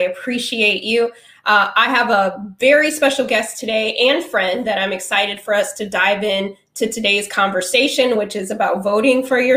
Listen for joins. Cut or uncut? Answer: uncut